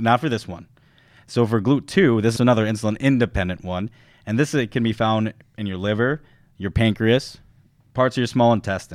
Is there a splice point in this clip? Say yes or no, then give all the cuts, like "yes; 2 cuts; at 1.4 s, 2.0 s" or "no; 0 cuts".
yes; 1 cut; at 2.4 s